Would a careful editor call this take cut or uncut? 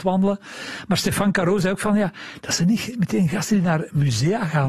uncut